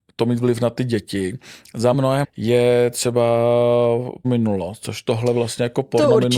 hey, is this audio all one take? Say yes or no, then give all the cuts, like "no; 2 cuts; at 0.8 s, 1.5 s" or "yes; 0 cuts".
no; 3 cuts; at 1.9 s, 2.2 s, 4.2 s